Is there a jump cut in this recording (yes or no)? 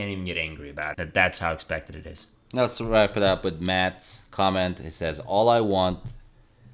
yes